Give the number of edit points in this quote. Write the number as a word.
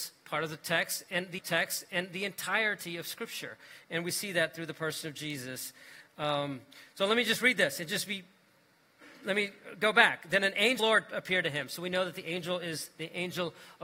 two